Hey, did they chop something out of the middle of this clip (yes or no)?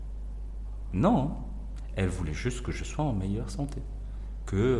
no